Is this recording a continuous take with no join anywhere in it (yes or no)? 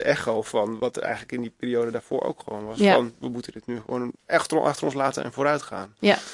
no